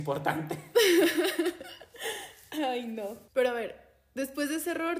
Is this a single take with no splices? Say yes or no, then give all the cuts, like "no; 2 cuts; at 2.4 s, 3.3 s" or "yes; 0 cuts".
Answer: no; 1 cut; at 3.3 s